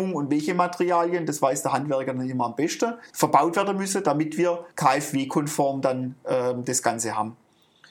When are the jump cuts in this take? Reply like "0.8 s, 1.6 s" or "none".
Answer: 3.1 s, 4.7 s